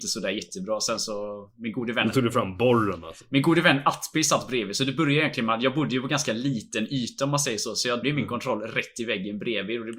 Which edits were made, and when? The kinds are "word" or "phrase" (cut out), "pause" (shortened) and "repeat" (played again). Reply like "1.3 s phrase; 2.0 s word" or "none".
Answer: 8.0 s word